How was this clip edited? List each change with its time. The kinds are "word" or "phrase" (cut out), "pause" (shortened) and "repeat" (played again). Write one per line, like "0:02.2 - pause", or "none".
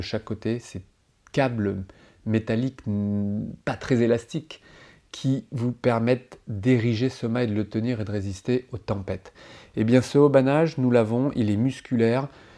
none